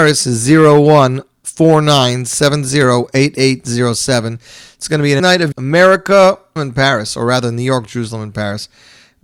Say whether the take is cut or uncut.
cut